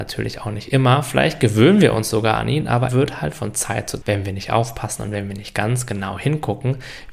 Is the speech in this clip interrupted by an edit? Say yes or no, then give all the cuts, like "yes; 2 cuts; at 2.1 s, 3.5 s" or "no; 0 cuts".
yes; 2 cuts; at 2.9 s, 4.0 s